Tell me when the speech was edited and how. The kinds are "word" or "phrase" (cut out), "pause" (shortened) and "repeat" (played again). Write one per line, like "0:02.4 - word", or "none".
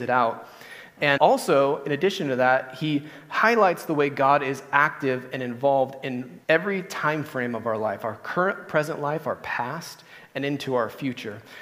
0:01.2 - word
0:06.4 - pause